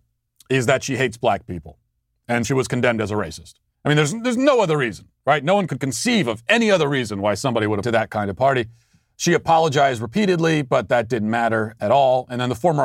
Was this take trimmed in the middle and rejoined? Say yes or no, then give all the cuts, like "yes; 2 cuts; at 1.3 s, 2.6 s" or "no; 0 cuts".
yes; 5 cuts; at 2.4 s, 3.7 s, 5.7 s, 7.8 s, 11.8 s